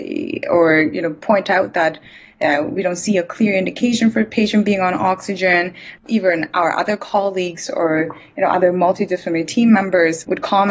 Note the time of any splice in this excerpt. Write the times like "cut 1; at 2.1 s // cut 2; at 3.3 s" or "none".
none